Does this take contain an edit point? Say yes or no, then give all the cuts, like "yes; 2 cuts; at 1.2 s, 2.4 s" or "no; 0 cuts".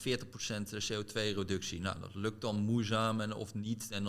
no; 0 cuts